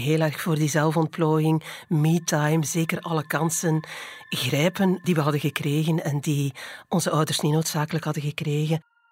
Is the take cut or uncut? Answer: uncut